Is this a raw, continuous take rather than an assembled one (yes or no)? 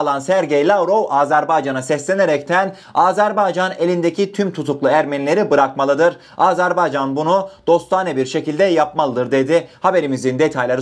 yes